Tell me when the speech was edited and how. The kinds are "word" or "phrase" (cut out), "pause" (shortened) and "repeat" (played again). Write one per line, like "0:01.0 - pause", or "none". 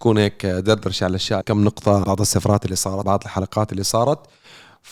0:01.4 - phrase
0:02.0 - word
0:03.0 - word